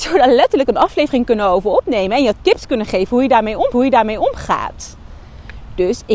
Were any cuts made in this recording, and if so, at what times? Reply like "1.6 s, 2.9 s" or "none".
3.7 s